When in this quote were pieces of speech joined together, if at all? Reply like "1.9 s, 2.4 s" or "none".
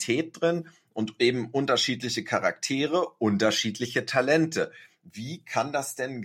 none